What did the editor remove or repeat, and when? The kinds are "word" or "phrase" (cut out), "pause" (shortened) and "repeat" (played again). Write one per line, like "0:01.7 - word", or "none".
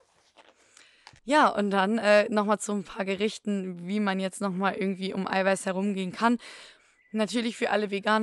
0:01.2 - pause